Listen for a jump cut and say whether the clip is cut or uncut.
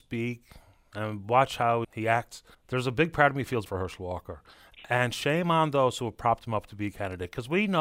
cut